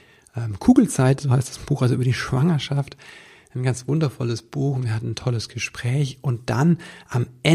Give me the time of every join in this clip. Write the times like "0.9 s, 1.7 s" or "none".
none